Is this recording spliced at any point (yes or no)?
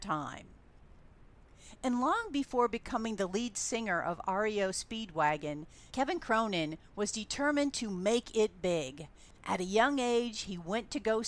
yes